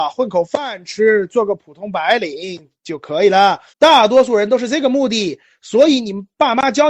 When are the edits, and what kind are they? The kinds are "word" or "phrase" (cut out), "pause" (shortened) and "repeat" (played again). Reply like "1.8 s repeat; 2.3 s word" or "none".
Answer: 3.7 s pause